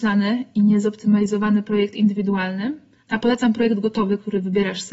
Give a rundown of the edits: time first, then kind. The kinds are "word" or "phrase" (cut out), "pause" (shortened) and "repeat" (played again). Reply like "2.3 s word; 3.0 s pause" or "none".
3.0 s pause

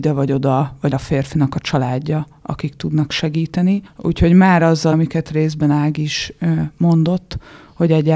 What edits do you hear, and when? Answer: 0.9 s word; 3.9 s pause; 4.9 s word

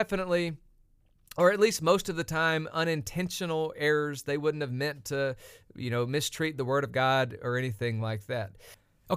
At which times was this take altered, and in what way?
none

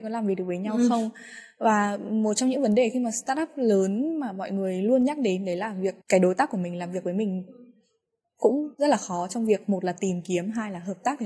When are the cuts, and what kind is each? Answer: 6.0 s pause; 8.7 s pause

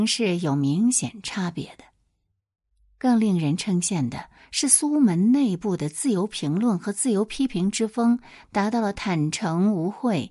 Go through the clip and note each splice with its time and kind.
none

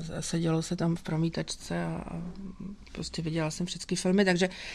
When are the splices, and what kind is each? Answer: 1.0 s word

